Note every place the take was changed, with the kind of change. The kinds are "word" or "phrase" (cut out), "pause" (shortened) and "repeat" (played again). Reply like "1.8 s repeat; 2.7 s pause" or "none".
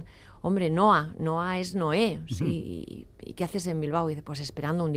none